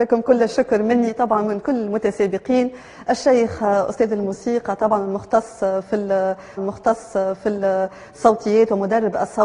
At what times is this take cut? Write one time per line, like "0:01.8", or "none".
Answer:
0:06.6